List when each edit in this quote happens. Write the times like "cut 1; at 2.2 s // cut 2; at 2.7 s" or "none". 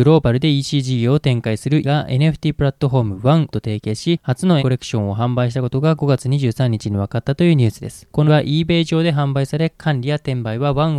cut 1; at 1.8 s // cut 2; at 3.5 s // cut 3; at 4.6 s // cut 4; at 8.3 s